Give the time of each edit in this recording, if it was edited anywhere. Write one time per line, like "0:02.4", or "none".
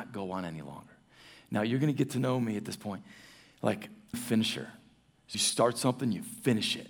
0:04.1
0:05.3